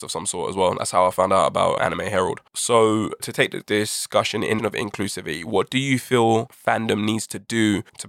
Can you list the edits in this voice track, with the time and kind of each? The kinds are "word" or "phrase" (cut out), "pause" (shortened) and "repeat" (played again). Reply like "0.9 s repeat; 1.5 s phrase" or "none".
1.8 s word; 2.5 s pause; 4.6 s phrase